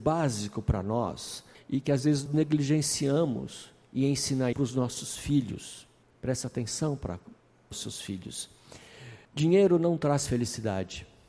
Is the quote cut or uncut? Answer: cut